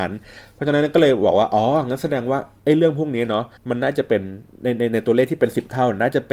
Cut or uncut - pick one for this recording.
cut